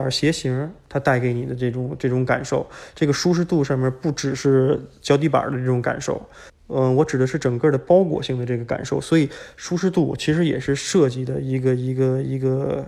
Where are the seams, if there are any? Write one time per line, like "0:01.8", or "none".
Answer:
0:06.5